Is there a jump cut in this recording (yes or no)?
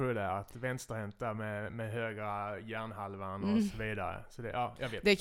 no